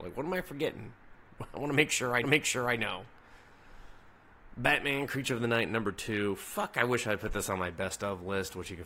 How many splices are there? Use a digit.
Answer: 1